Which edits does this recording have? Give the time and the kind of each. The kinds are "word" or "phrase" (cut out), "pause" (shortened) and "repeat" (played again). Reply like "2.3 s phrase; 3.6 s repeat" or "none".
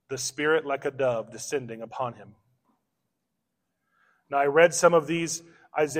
none

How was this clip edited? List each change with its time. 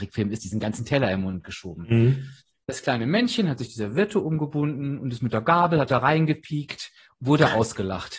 none

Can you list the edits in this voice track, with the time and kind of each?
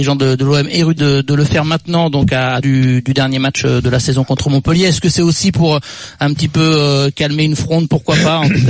1.0 s phrase; 2.6 s phrase

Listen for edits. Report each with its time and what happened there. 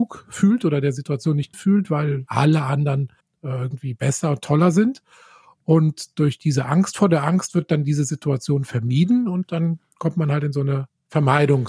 1.5 s word; 2.3 s word; 3.2 s pause

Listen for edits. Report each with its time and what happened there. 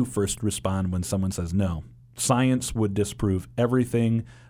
2.0 s pause

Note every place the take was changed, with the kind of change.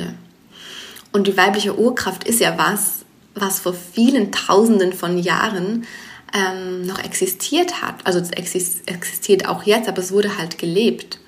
none

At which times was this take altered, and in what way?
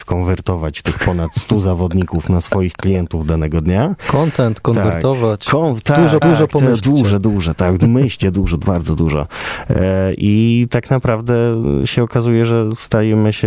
6.2 s repeat

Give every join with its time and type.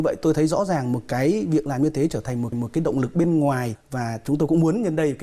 2.5 s repeat

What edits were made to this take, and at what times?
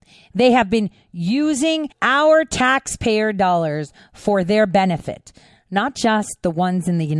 1.9 s pause

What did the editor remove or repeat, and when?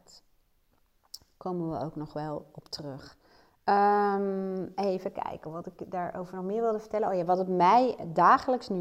none

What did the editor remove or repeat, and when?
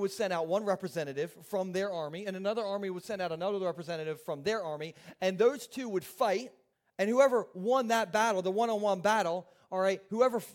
6.7 s pause

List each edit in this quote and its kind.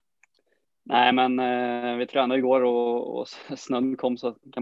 none

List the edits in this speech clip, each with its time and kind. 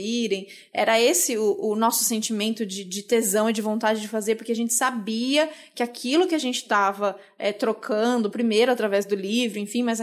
none

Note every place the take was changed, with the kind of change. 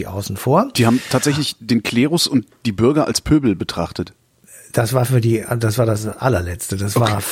none

